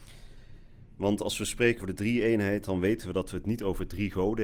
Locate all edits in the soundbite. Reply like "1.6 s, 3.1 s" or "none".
1.8 s